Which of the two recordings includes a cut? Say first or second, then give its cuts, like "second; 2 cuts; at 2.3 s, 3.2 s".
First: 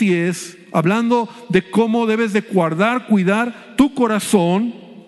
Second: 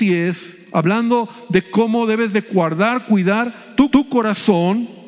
second; 1 cut; at 3.9 s